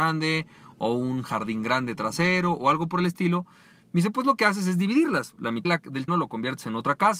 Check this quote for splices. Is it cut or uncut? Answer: cut